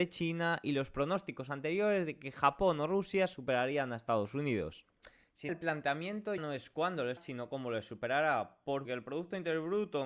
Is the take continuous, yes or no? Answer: no